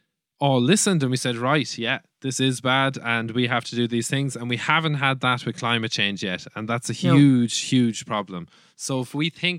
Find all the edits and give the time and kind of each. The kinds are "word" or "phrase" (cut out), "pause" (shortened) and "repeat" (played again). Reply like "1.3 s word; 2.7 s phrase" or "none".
none

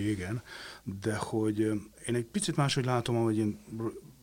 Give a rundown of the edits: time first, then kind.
none

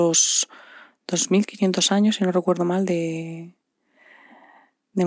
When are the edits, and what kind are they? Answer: none

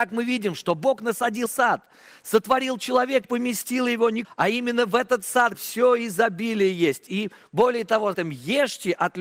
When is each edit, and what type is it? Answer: 1.5 s word; 3.2 s word; 4.2 s word; 5.5 s word; 8.1 s word

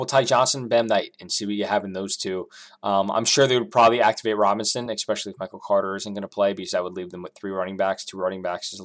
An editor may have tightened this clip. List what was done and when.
none

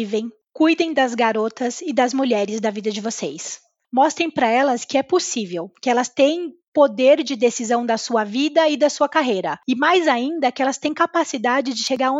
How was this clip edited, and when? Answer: none

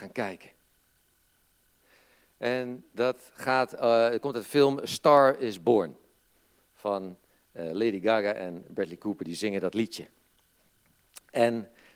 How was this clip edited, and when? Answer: none

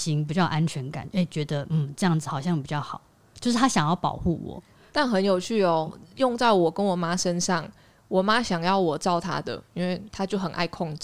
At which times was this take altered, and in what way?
none

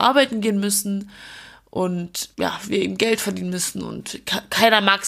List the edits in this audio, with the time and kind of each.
2.3 s pause

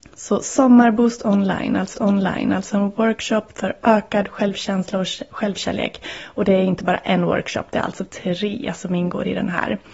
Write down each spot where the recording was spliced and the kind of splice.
1.9 s repeat

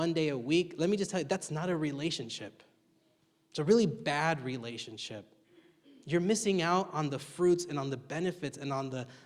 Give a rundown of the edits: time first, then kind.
none

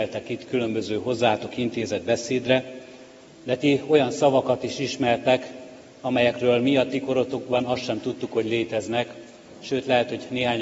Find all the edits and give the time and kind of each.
none

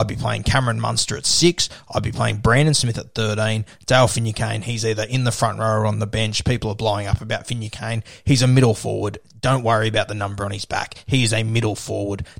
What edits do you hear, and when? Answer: none

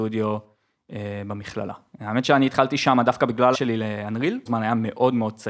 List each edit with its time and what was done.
3.5 s word; 4.5 s word

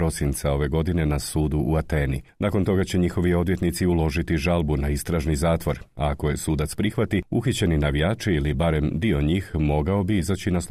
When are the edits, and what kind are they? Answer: none

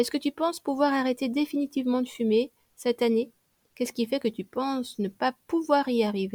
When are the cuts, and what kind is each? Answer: none

